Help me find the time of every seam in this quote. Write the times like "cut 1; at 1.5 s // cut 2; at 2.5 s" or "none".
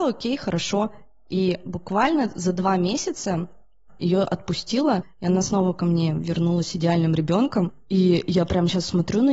none